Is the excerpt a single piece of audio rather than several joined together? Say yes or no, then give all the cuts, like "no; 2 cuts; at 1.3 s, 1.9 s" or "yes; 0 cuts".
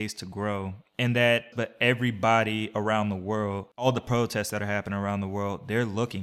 no; 1 cut; at 1.5 s